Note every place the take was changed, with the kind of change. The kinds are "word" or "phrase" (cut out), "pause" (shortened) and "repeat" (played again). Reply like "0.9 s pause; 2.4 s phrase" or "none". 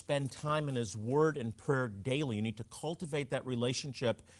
none

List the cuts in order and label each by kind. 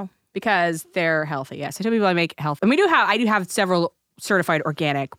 2.6 s word

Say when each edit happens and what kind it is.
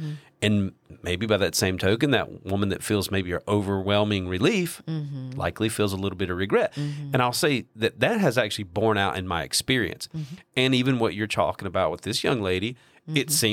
none

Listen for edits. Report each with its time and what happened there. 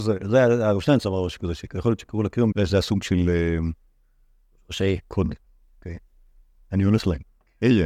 2.5 s word

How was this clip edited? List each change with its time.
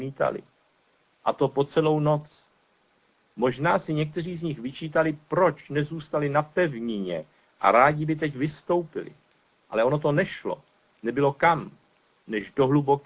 none

